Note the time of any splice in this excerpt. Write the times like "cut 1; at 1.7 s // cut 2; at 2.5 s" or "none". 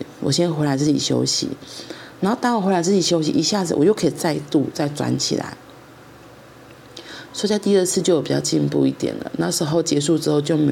none

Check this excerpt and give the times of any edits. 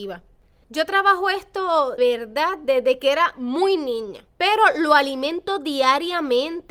cut 1; at 2.0 s // cut 2; at 4.3 s

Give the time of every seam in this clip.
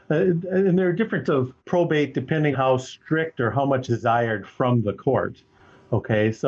cut 1; at 1.3 s // cut 2; at 1.6 s // cut 3; at 2.5 s // cut 4; at 3.9 s

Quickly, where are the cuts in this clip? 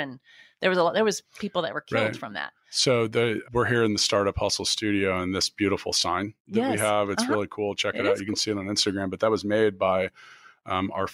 cut 1; at 3.4 s

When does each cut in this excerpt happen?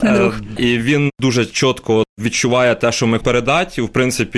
cut 1; at 3.2 s

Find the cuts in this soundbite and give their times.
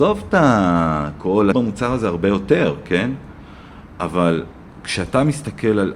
cut 1; at 1.5 s

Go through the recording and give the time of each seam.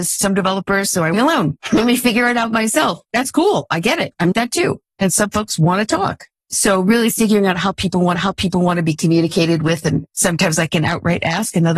cut 1; at 1.1 s // cut 2; at 4.3 s // cut 3; at 8.1 s

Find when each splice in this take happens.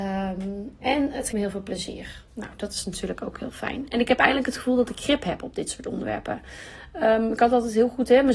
cut 1; at 1.3 s // cut 2; at 2.3 s

